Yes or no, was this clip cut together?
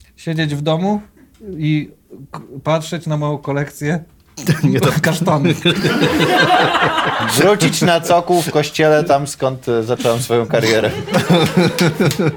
no